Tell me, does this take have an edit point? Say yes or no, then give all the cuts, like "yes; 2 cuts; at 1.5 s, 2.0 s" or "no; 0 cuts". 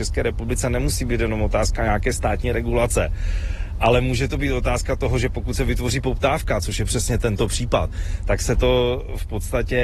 no; 0 cuts